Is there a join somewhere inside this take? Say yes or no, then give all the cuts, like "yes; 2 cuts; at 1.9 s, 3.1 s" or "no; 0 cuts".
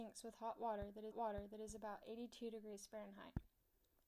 yes; 1 cut; at 1.1 s